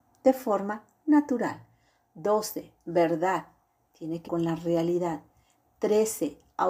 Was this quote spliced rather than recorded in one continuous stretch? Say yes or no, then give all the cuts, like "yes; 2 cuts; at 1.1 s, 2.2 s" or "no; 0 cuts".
yes; 1 cut; at 4.3 s